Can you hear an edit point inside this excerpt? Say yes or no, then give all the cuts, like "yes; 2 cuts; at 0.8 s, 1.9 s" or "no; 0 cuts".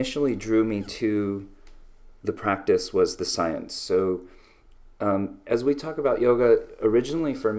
no; 0 cuts